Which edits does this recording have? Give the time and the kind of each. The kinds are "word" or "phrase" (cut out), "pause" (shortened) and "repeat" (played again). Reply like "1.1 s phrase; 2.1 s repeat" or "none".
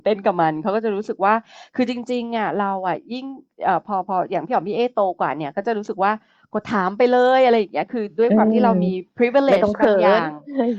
none